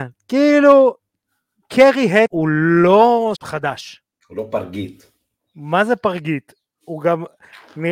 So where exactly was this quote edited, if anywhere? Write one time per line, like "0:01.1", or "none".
0:02.3
0:03.3